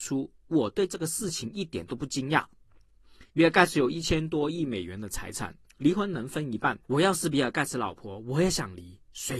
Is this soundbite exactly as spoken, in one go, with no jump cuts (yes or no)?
no